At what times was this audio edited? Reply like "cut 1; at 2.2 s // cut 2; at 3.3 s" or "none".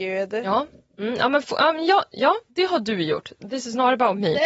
cut 1; at 2.5 s